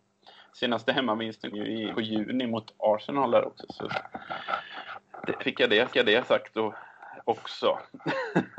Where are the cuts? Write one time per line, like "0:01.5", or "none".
0:01.5
0:01.9
0:05.4
0:05.9